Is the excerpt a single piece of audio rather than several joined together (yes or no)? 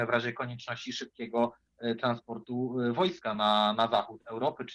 yes